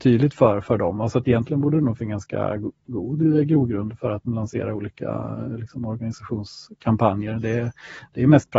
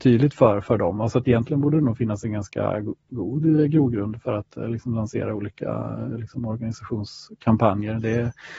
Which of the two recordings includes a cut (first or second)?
first